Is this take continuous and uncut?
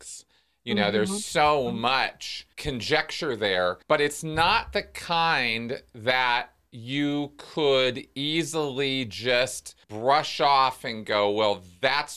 no; 3 cuts; at 2.5 s, 3.8 s, 9.8 s

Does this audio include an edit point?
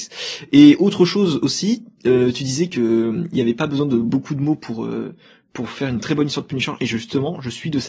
no; 0 cuts

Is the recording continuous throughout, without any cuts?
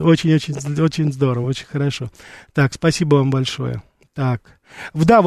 yes; 0 cuts

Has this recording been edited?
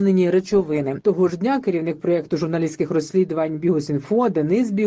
no; 0 cuts

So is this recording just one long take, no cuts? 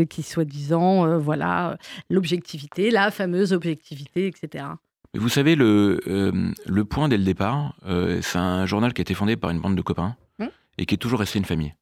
yes; 0 cuts

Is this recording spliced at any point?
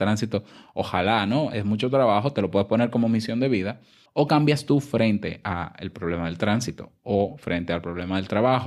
yes; 1 cut; at 4.1 s

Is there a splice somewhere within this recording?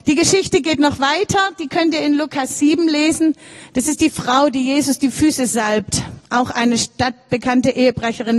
no; 0 cuts

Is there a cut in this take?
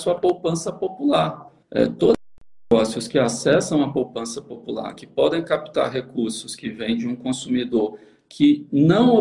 yes; 1 cut; at 1.6 s

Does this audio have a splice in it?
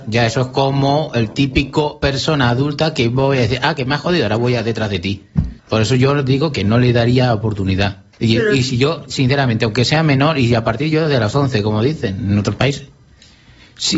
yes; 2 cuts; at 5.6 s, 8.1 s

